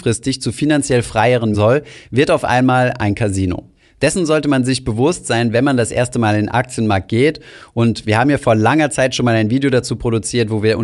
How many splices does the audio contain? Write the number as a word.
one